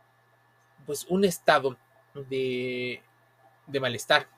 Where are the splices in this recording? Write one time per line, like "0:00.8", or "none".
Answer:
0:02.0